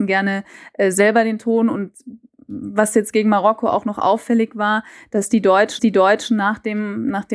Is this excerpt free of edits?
no; 1 cut; at 5.8 s

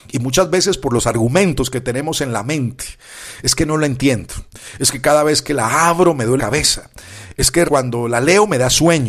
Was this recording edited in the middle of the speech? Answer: yes; 2 cuts; at 6.4 s, 7.7 s

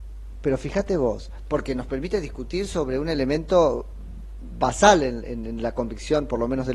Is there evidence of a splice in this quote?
no; 0 cuts

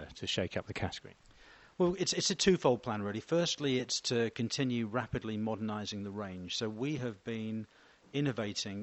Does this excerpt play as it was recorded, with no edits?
yes; 0 cuts

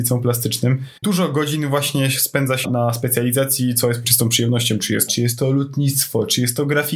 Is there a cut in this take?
yes; 4 cuts; at 1.0 s, 2.6 s, 4.0 s, 5.1 s

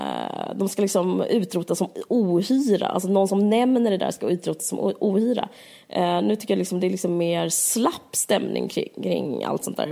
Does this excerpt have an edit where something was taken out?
no; 0 cuts

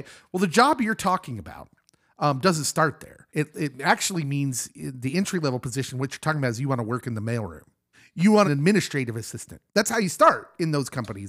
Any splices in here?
yes; 4 cuts; at 3.3 s, 7.9 s, 8.4 s, 9.7 s

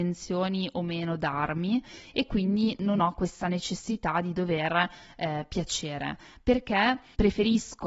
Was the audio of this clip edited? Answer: no; 0 cuts

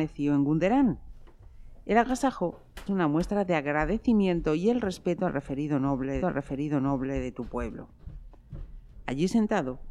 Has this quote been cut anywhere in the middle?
yes; 2 cuts; at 2.9 s, 6.2 s

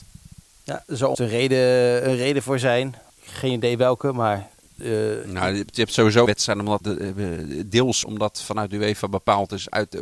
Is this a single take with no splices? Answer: no; 5 cuts; at 1.1 s, 3.1 s, 6.3 s, 6.8 s, 8.0 s

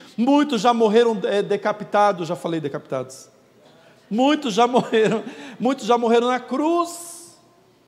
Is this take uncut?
yes; 0 cuts

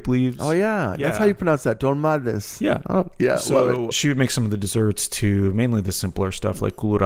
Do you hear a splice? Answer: yes; 1 cut; at 3.9 s

